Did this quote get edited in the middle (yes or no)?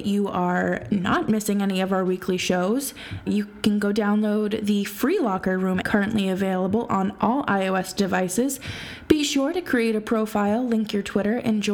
yes